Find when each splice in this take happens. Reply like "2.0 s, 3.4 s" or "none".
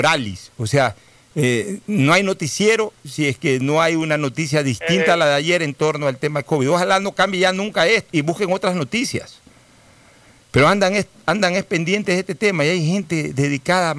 8.1 s